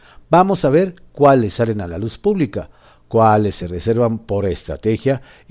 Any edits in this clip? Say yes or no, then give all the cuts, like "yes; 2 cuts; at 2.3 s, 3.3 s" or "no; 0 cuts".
no; 0 cuts